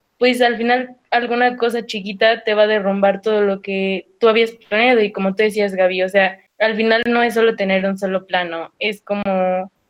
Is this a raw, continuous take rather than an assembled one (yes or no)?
no